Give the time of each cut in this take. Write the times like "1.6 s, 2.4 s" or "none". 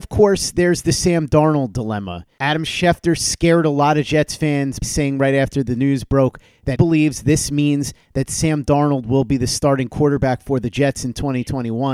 4.8 s, 6.8 s

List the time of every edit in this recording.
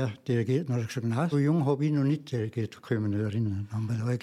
1.3 s

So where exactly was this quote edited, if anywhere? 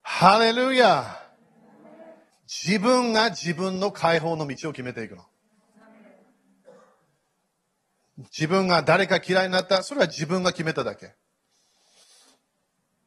2.3 s, 8.3 s

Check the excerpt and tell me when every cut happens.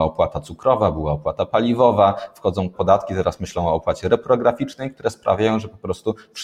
2.7 s

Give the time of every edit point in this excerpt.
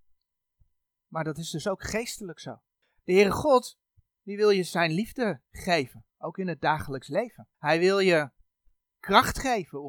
6.1 s, 7.5 s

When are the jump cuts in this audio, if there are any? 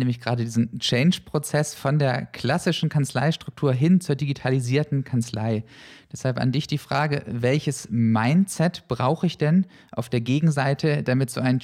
none

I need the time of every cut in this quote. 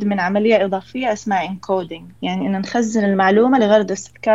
2.2 s

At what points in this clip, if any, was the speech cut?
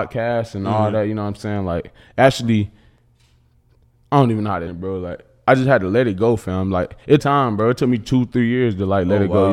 4.7 s, 7.2 s

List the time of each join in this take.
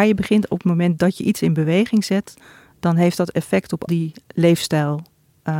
3.9 s

